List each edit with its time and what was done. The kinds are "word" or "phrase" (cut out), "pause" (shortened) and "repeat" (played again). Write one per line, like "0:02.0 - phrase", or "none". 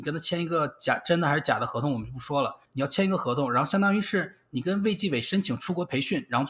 0:02.6 - pause